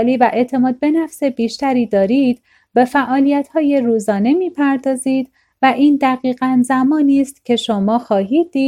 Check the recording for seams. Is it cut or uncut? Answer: uncut